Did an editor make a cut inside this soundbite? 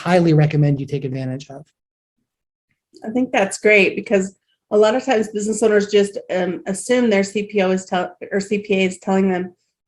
no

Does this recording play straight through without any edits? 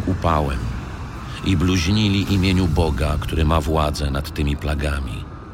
yes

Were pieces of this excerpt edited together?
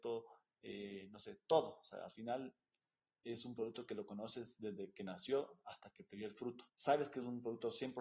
yes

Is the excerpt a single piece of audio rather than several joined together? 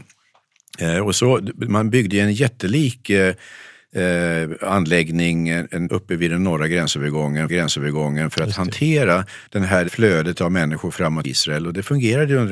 no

